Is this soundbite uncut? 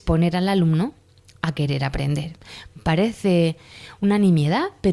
yes; 0 cuts

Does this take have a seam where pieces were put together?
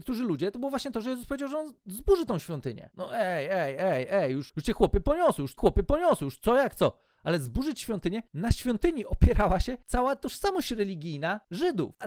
yes; 1 cut; at 5.6 s

